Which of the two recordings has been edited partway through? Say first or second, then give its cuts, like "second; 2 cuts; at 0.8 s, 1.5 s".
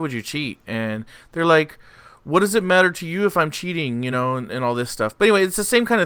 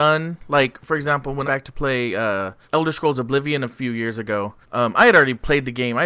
second; 3 cuts; at 1.4 s, 2.6 s, 4.6 s